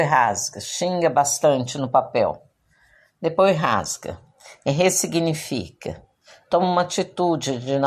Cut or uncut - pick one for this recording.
uncut